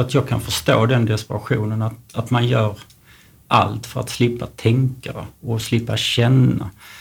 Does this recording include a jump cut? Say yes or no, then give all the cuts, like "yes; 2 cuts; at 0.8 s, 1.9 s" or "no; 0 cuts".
no; 0 cuts